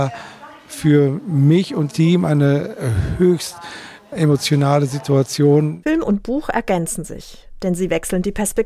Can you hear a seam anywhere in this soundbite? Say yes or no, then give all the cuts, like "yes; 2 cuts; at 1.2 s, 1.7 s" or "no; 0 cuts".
yes; 1 cut; at 1.9 s